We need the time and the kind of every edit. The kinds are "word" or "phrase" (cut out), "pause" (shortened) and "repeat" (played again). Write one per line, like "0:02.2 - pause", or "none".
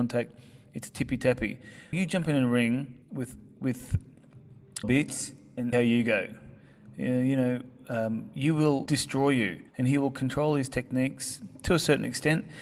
0:01.9 - word
0:03.0 - pause
0:04.8 - word
0:05.7 - phrase
0:08.9 - phrase
0:09.7 - pause

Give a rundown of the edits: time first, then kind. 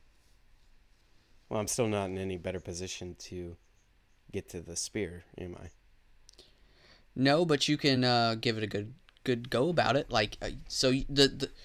none

